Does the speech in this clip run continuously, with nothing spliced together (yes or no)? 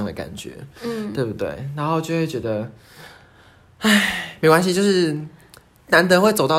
yes